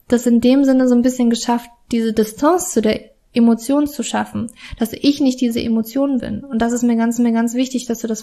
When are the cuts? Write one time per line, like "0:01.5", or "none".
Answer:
0:07.2

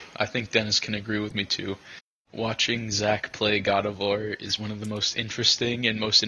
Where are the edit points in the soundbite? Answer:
0:04.6

